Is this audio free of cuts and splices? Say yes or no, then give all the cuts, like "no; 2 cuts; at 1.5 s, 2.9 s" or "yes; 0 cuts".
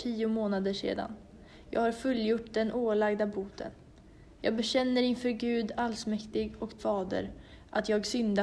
no; 1 cut; at 6.8 s